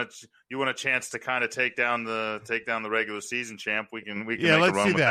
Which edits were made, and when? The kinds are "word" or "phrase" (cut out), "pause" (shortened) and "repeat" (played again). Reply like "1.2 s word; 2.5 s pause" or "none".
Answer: none